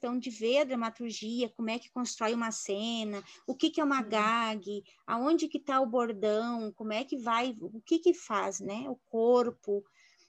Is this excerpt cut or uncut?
uncut